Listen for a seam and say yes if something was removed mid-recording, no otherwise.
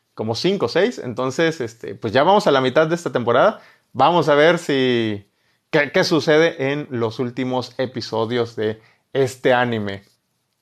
no